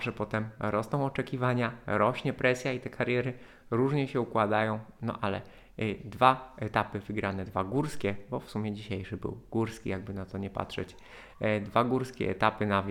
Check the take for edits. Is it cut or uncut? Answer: uncut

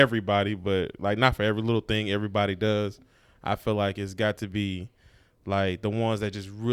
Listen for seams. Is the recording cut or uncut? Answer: uncut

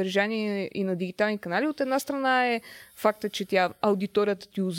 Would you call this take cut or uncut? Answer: uncut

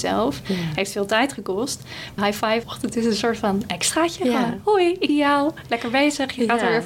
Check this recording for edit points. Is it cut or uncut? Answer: cut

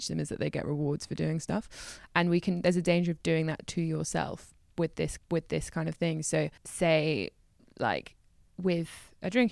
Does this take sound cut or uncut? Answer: cut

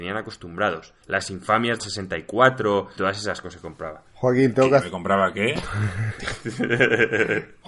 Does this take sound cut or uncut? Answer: cut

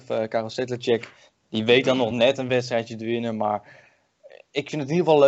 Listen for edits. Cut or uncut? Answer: uncut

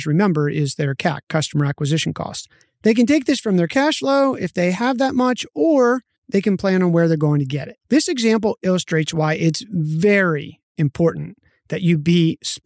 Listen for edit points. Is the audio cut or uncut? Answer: cut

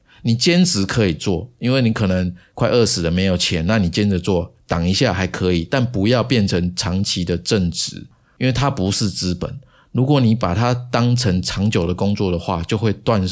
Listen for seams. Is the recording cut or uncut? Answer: uncut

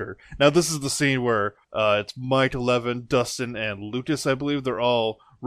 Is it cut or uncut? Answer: cut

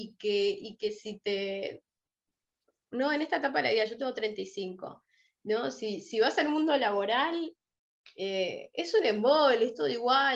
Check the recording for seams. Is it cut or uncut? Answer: uncut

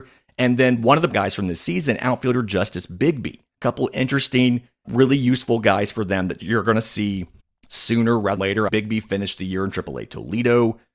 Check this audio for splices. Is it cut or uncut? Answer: cut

